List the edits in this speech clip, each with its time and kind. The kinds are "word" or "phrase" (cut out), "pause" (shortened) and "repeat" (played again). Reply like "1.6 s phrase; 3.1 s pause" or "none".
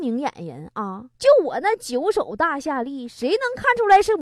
1.1 s pause